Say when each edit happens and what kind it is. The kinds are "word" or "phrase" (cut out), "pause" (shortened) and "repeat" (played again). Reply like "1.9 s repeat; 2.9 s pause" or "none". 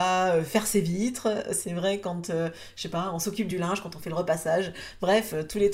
none